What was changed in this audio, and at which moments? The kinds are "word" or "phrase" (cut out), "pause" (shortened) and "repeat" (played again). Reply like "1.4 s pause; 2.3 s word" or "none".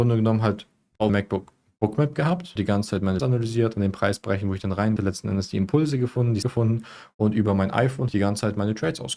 1.1 s word; 2.6 s word; 3.2 s word; 5.0 s word; 6.4 s word; 8.1 s word

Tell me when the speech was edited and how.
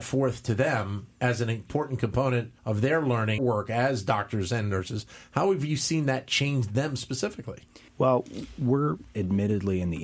2.6 s pause; 3.4 s phrase; 7.9 s pause; 9.1 s word

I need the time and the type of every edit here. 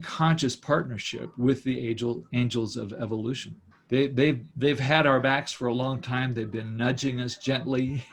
3.7 s pause

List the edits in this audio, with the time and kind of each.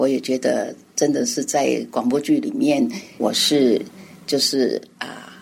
3.2 s word

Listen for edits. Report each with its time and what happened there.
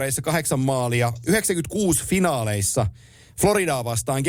none

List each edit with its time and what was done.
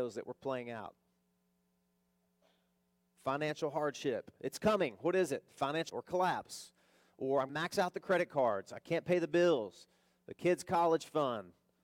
5.9 s word; 7.5 s word

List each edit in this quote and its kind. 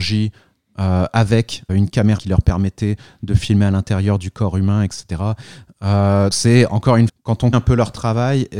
1.7 s word; 2.2 s word; 6.3 s word; 7.1 s word; 7.5 s word

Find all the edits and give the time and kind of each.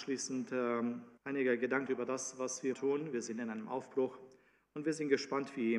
1.2 s pause; 1.9 s phrase; 2.7 s word

